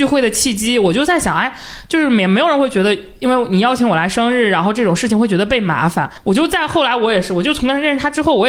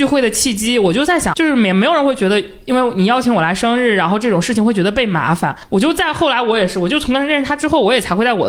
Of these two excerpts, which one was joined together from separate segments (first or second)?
second